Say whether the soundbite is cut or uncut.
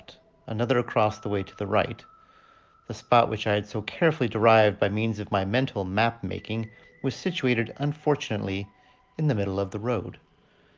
uncut